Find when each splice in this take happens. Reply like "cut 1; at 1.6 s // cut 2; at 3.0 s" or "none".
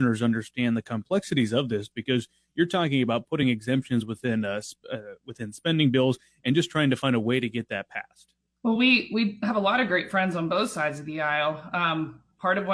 none